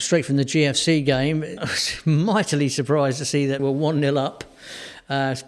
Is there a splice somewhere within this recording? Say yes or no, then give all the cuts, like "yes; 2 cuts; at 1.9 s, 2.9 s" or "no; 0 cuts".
yes; 2 cuts; at 1.6 s, 3.6 s